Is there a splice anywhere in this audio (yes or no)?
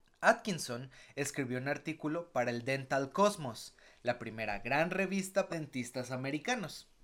yes